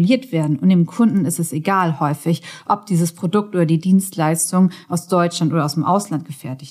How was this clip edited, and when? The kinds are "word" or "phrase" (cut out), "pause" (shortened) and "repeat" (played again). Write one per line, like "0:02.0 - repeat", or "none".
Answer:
none